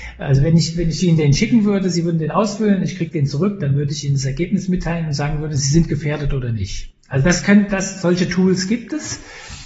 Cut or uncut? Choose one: uncut